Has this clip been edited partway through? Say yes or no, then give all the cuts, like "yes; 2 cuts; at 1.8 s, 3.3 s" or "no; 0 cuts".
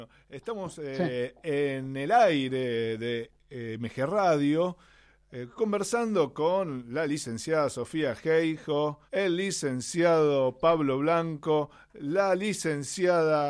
yes; 1 cut; at 9.1 s